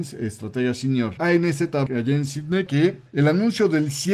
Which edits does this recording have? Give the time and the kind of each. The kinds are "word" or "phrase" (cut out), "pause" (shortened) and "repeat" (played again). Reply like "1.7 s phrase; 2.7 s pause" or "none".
1.2 s word; 1.9 s word; 2.7 s phrase; 3.1 s pause